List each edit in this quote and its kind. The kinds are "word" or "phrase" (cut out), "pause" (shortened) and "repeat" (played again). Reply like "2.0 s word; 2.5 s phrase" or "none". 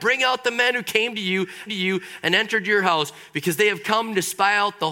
1.7 s repeat